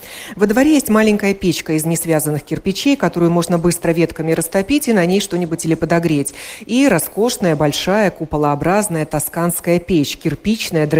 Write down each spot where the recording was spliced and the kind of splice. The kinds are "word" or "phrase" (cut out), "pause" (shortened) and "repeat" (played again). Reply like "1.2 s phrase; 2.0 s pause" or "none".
5.6 s word